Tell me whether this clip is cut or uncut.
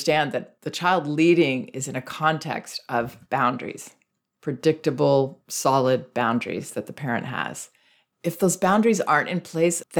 uncut